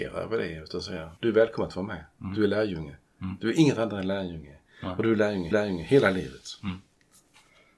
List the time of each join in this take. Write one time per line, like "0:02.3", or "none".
0:01.2
0:05.5